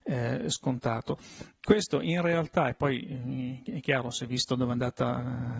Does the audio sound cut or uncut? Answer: uncut